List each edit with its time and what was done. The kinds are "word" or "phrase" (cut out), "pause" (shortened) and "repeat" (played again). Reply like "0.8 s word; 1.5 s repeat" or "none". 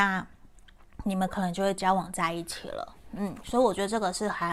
none